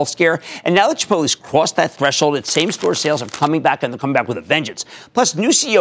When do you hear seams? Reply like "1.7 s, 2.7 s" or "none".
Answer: none